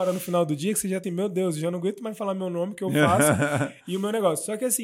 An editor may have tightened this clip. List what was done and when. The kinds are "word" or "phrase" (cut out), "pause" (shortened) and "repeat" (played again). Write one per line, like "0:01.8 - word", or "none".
0:01.0 - word